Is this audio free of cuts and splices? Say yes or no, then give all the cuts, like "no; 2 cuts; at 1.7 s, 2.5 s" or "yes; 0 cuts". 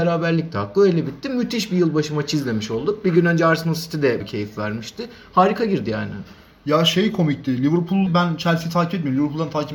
no; 2 cuts; at 4.2 s, 8.1 s